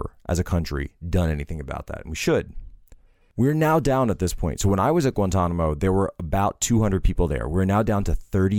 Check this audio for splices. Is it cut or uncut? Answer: uncut